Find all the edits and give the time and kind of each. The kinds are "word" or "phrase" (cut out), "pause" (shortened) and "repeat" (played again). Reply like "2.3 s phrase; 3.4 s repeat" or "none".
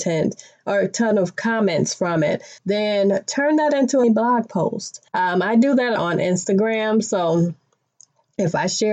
2.6 s pause; 4.0 s word; 5.1 s pause; 6.0 s word